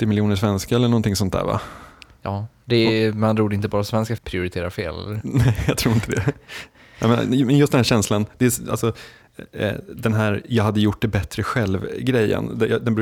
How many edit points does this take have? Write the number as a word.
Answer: one